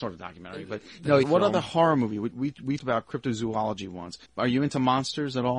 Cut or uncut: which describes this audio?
cut